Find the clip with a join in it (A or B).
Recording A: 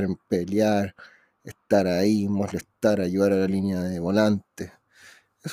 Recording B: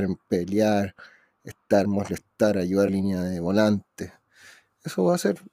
B